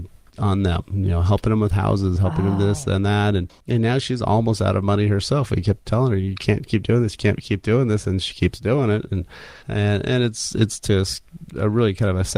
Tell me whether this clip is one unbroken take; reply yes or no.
no